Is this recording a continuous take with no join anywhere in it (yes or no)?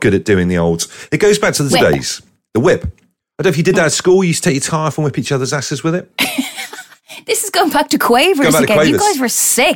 no